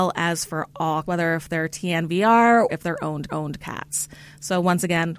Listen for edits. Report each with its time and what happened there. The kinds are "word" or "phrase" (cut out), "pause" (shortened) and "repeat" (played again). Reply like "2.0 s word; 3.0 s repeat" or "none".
1.1 s word; 2.7 s word; 3.3 s repeat